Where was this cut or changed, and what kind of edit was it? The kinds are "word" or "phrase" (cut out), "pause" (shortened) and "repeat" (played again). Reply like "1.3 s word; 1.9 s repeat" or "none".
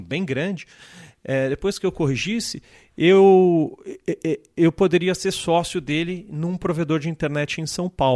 none